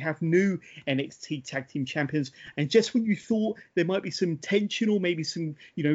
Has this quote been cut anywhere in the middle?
no; 0 cuts

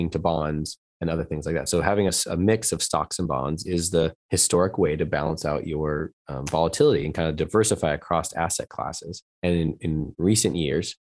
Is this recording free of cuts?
no; 2 cuts; at 4.2 s, 9.3 s

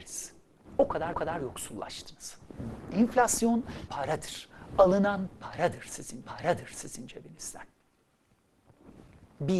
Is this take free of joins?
no; 3 cuts; at 1.1 s, 3.9 s, 6.2 s

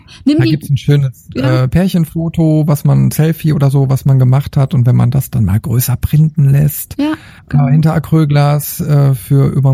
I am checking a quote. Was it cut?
yes; 1 cut; at 7.4 s

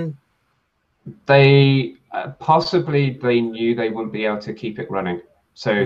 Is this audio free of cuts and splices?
yes; 0 cuts

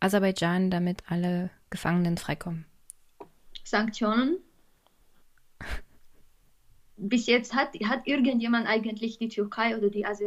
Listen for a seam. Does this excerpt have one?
no; 0 cuts

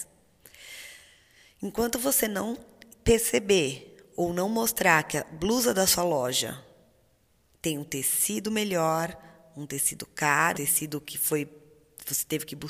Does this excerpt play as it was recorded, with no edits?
no; 1 cut; at 10.5 s

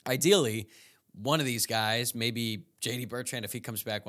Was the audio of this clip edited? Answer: no; 0 cuts

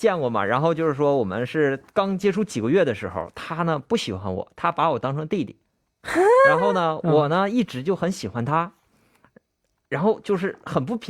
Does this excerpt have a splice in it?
no; 0 cuts

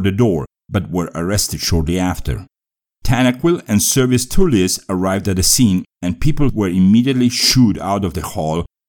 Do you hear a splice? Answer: no; 0 cuts

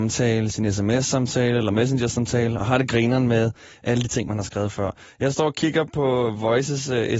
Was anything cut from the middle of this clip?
no; 0 cuts

